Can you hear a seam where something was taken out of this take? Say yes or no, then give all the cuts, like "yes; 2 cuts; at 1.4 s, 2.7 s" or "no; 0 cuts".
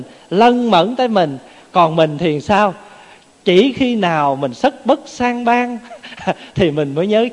no; 0 cuts